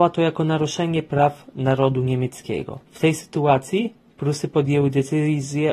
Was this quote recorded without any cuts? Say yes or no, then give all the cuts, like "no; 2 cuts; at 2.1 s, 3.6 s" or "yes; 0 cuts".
no; 1 cut; at 2.8 s